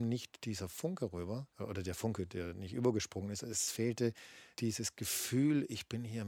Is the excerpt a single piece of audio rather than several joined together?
no; 2 cuts; at 1.5 s, 4.5 s

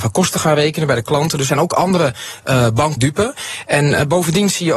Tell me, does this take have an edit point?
yes; 2 cuts; at 1.5 s, 3.0 s

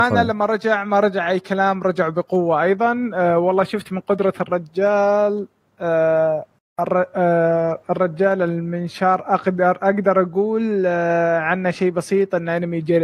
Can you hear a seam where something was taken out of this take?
no; 0 cuts

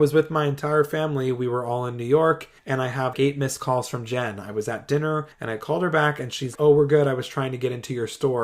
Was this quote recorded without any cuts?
no; 4 cuts; at 2.6 s, 3.1 s, 5.3 s, 6.6 s

